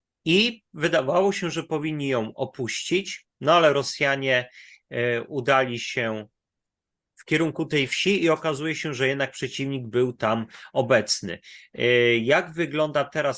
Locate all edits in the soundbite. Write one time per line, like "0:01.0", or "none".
none

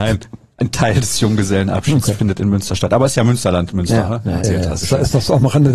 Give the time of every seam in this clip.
0:04.4
0:04.8

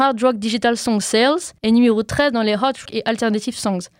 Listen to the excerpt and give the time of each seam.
0:01.6
0:02.9

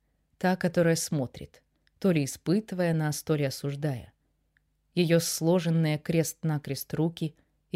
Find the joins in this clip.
none

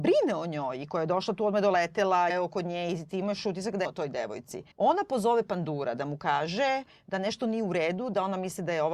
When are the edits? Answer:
0:02.3
0:03.8
0:04.7

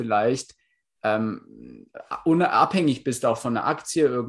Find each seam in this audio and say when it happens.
none

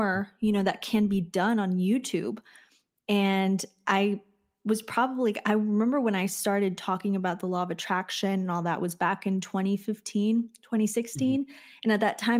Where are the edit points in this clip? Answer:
none

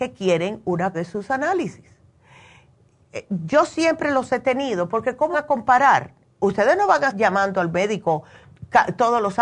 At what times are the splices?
0:00.9
0:05.3
0:07.1

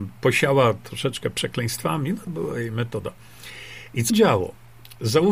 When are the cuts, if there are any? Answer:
0:02.3
0:04.1

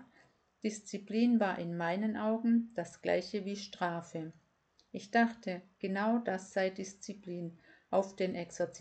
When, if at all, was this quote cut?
none

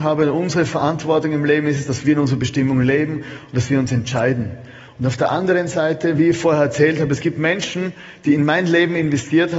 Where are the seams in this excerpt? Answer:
none

